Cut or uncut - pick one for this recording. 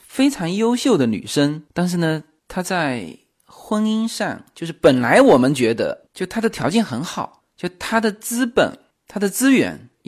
uncut